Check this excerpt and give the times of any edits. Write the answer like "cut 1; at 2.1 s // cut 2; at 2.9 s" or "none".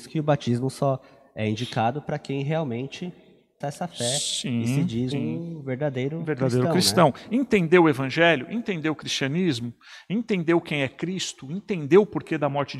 cut 1; at 3.6 s // cut 2; at 5.1 s